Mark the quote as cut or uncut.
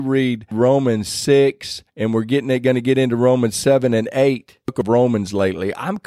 cut